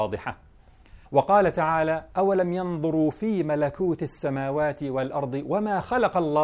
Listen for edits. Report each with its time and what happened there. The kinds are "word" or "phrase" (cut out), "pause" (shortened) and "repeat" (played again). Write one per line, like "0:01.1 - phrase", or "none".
0:01.1 - pause